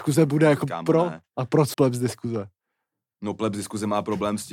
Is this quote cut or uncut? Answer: cut